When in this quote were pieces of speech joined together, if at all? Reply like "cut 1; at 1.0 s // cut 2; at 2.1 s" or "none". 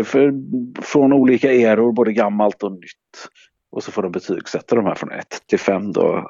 none